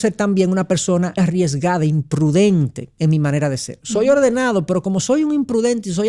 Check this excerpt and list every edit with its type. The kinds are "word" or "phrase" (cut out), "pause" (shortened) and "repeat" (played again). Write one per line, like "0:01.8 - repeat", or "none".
0:01.2 - word